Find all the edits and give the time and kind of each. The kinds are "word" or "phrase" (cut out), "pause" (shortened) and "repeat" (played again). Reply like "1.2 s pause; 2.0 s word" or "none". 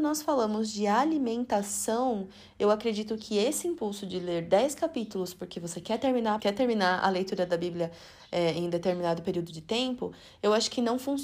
6.4 s word